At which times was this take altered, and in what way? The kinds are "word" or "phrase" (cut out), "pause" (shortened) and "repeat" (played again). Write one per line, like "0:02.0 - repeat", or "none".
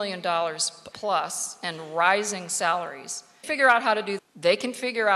0:00.9 - word
0:03.4 - phrase
0:04.2 - word